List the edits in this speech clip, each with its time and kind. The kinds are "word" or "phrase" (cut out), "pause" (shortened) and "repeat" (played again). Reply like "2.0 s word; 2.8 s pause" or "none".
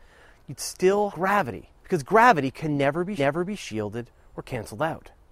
1.1 s word; 1.8 s pause; 3.2 s repeat

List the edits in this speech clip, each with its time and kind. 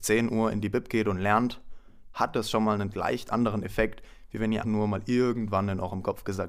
2.1 s word; 4.6 s word

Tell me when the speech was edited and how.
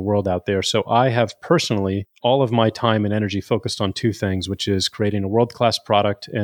2.2 s word

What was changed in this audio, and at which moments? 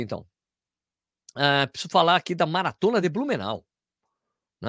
none

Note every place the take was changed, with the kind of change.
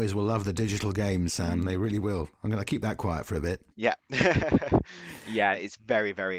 3.7 s pause

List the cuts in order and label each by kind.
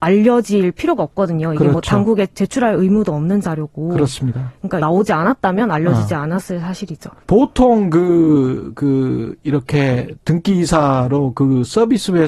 2.3 s pause; 4.8 s word; 7.2 s pause

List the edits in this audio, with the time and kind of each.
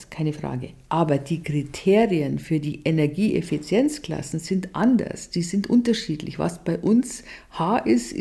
none

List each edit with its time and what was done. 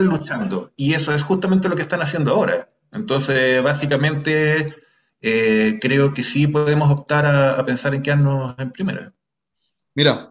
none

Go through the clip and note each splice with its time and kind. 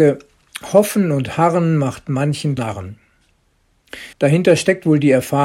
2.6 s word; 4.1 s pause

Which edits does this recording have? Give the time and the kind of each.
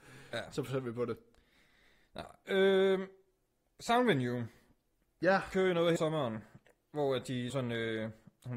6.0 s word; 7.5 s word

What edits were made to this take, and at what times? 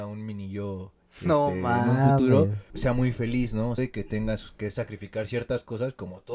1.0 s pause; 2.7 s phrase; 3.8 s phrase

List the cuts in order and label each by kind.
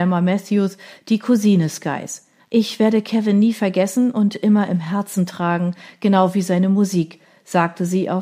2.4 s pause

